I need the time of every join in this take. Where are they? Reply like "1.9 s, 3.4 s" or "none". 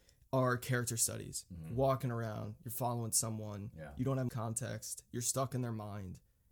4.3 s

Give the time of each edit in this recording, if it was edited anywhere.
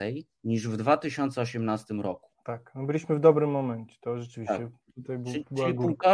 2.3 s

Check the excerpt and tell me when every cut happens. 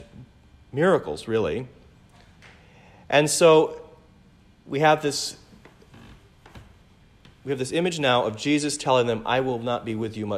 none

